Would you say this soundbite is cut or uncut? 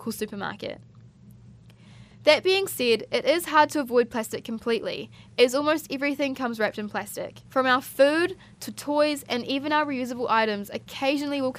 cut